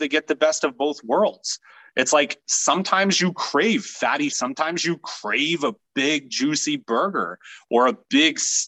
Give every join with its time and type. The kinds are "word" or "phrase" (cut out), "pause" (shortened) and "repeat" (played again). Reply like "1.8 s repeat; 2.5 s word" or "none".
4.3 s word